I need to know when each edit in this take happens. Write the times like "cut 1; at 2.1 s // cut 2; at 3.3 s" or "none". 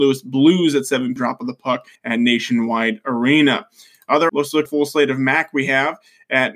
cut 1; at 1.2 s // cut 2; at 2.0 s // cut 3; at 4.3 s // cut 4; at 4.7 s